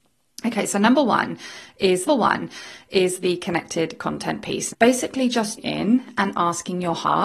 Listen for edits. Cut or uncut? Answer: cut